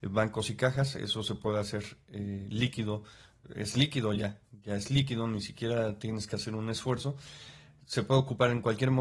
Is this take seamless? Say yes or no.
yes